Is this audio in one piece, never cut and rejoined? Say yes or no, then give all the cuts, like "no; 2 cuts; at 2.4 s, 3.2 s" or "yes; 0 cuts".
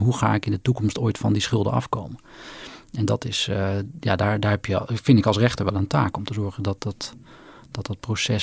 yes; 0 cuts